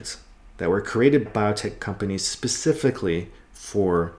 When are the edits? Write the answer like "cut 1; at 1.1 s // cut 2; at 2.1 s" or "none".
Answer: cut 1; at 1.3 s